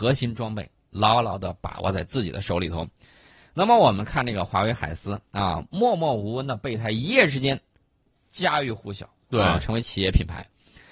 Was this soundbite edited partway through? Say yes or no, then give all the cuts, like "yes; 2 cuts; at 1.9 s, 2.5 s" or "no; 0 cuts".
no; 0 cuts